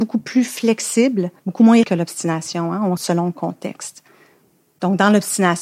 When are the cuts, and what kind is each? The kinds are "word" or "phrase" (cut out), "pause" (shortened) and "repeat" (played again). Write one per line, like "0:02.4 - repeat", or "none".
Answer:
0:01.4 - pause
0:01.8 - word
0:03.0 - word